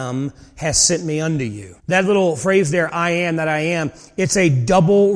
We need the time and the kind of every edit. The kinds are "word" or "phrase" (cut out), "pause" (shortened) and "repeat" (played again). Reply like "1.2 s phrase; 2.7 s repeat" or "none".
1.8 s pause